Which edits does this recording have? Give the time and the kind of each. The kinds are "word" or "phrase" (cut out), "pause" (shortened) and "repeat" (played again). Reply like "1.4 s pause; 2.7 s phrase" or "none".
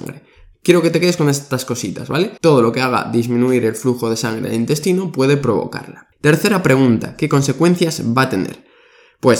2.4 s pause; 6.1 s pause